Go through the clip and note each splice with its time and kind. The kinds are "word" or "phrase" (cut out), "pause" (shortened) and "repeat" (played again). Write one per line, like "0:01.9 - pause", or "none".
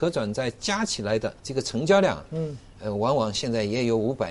0:01.4 - pause